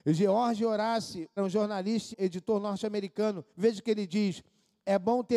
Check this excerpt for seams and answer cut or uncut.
cut